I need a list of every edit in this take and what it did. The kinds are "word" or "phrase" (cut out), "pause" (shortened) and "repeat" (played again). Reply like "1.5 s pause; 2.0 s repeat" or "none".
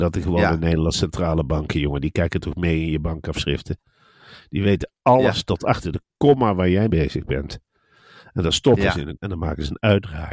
6.9 s word; 9.2 s word

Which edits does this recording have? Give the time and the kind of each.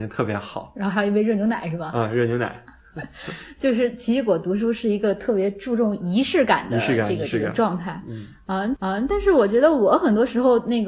8.7 s repeat

